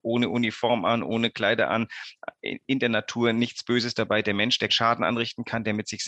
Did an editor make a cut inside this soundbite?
yes; 1 cut; at 4.7 s

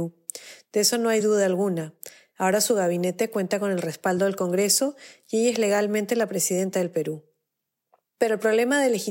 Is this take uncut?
yes; 0 cuts

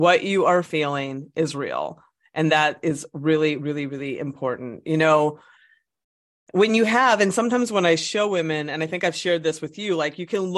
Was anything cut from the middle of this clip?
no; 0 cuts

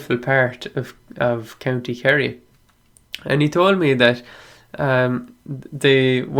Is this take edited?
no; 0 cuts

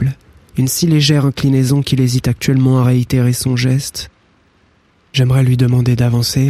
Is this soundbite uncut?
yes; 0 cuts

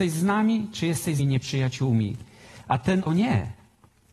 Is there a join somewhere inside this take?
yes; 2 cuts; at 1.2 s, 3.1 s

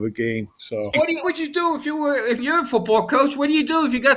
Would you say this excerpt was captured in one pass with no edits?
no; 3 cuts; at 0.9 s, 1.2 s, 2.4 s

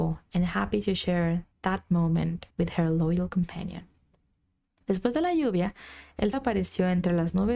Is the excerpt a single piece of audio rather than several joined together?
no; 3 cuts; at 1.5 s, 2.5 s, 6.3 s

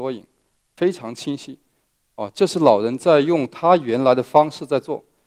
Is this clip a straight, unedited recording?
yes; 0 cuts

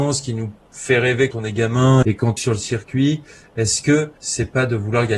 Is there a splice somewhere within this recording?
yes; 4 cuts; at 1.3 s, 2.0 s, 2.4 s, 4.2 s

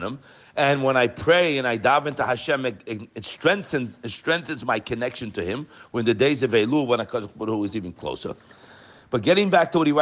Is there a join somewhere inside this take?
no; 0 cuts

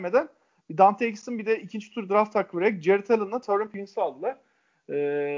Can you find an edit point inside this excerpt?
no; 0 cuts

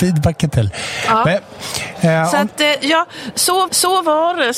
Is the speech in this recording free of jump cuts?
no; 1 cut; at 3.7 s

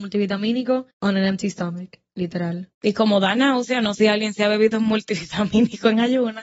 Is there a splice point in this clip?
yes; 3 cuts; at 0.9 s, 2.7 s, 4.0 s

